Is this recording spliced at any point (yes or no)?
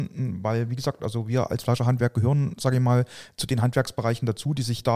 no